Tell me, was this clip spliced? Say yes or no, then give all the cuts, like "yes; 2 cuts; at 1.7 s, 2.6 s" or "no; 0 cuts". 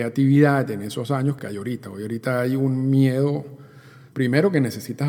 yes; 2 cuts; at 1.4 s, 4.1 s